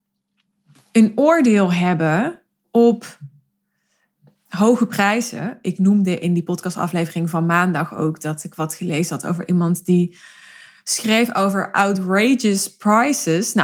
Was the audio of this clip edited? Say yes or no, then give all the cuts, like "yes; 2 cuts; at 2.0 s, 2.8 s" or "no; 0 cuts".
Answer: no; 0 cuts